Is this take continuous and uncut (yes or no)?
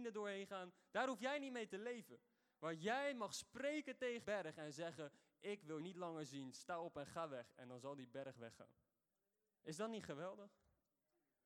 no